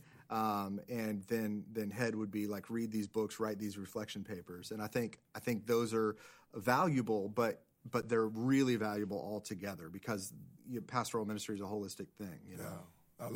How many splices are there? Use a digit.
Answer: 1